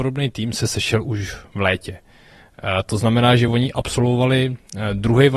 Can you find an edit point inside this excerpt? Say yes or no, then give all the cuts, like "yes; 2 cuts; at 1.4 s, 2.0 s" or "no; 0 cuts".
no; 0 cuts